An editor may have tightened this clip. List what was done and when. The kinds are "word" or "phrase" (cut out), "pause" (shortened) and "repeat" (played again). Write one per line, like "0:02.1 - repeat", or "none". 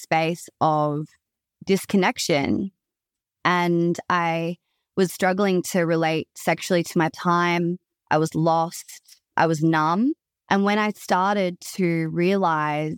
0:05.1 - word
0:07.1 - phrase